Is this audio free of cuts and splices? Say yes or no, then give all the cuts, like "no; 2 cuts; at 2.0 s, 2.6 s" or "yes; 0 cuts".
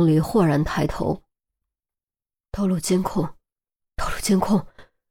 yes; 0 cuts